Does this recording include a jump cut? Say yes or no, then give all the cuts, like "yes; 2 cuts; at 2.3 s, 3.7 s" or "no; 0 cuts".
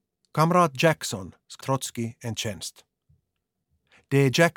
yes; 1 cut; at 1.6 s